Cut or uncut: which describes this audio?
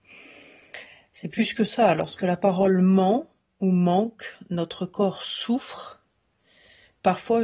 uncut